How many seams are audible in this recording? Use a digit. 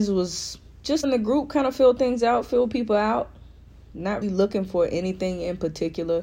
2